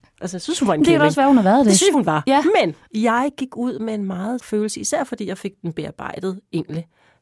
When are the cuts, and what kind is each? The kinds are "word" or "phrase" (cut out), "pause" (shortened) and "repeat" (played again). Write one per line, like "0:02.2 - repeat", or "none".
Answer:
0:01.9 - word
0:02.9 - pause
0:04.4 - word